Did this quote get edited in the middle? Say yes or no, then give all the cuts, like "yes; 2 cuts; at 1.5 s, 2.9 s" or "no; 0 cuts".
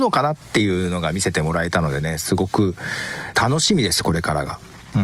yes; 1 cut; at 3.3 s